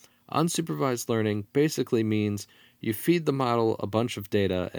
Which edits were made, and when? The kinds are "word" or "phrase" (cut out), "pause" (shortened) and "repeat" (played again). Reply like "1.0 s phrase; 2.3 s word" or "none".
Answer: none